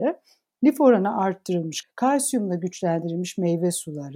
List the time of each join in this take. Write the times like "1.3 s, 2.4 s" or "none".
1.8 s